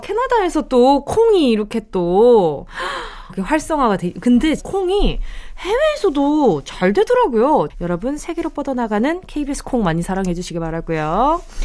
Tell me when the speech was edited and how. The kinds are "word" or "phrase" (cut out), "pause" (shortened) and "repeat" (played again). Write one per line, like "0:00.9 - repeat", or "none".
0:03.3 - word
0:04.6 - word